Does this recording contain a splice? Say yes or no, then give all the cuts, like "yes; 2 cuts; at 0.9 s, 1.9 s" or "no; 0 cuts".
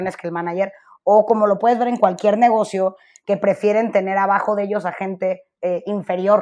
no; 0 cuts